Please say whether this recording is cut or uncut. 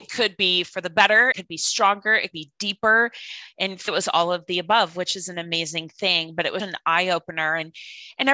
cut